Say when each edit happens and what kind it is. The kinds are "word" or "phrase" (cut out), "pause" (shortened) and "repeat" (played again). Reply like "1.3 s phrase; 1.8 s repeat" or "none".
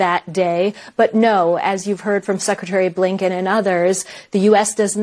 none